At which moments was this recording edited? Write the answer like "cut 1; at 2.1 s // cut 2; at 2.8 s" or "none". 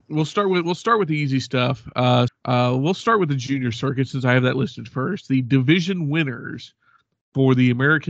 cut 1; at 2.3 s